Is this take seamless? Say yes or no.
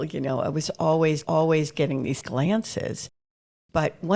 no